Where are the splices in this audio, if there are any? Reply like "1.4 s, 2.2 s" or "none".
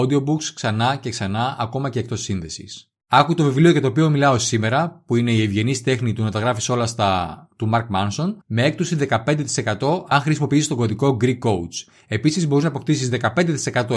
8.4 s